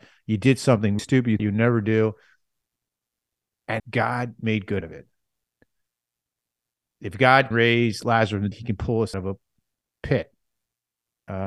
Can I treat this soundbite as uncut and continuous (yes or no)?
no